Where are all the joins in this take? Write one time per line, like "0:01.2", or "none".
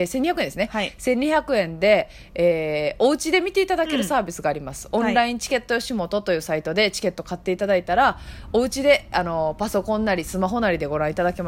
none